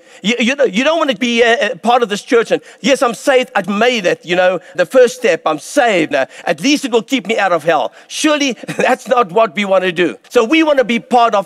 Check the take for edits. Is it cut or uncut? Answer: cut